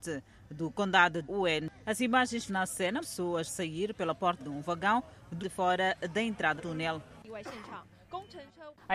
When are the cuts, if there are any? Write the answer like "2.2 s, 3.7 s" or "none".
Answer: 1.2 s, 2.5 s, 3.0 s, 3.5 s, 4.4 s, 5.4 s, 6.6 s